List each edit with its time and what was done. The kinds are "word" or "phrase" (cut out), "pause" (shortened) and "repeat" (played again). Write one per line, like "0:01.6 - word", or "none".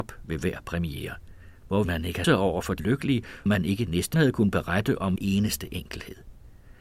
0:01.8 - word
0:02.2 - word
0:02.8 - word
0:03.5 - word
0:04.1 - word
0:05.2 - word